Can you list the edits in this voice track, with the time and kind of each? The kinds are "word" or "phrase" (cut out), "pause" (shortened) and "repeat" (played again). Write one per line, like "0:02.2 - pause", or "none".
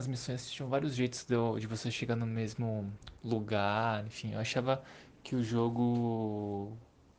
none